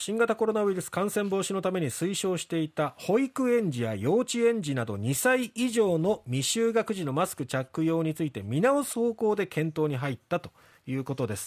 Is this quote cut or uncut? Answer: uncut